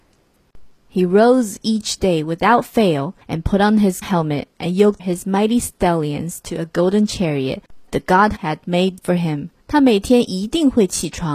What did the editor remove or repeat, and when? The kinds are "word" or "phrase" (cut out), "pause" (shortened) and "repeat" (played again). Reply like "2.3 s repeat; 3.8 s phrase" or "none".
3.2 s pause; 4.0 s word; 5.0 s word; 7.9 s word; 8.4 s word; 9.0 s word; 9.6 s pause